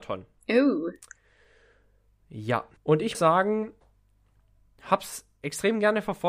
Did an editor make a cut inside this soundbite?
yes; 3 cuts; at 2.8 s, 3.1 s, 4.8 s

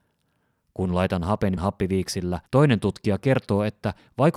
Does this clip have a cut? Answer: yes; 2 cuts; at 1.6 s, 2.5 s

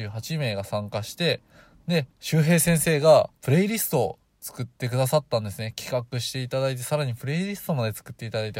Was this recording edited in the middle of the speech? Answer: yes; 2 cuts; at 2.1 s, 3.4 s

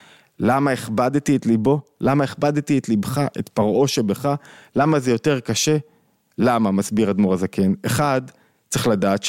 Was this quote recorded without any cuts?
yes; 0 cuts

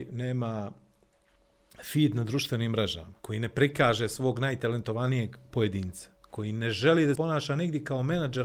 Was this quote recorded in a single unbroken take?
no; 2 cuts; at 3.2 s, 7.2 s

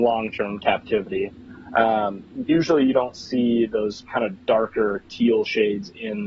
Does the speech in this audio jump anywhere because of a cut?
no; 0 cuts

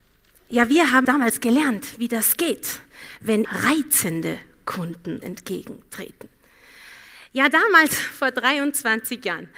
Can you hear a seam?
yes; 3 cuts; at 1.0 s, 3.4 s, 5.2 s

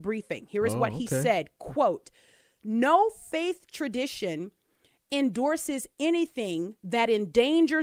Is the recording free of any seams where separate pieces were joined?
yes; 0 cuts

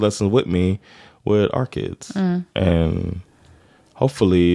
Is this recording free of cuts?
yes; 0 cuts

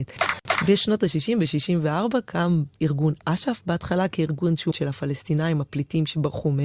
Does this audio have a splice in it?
yes; 2 cuts; at 2.7 s, 4.7 s

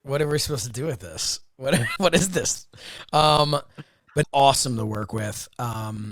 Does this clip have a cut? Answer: yes; 2 cuts; at 2.0 s, 4.2 s

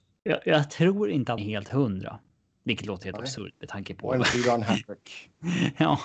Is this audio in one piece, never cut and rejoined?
no; 1 cut; at 1.4 s

